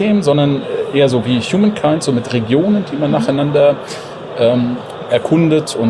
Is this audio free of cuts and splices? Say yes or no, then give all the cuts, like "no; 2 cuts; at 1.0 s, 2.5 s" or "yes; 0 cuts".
yes; 0 cuts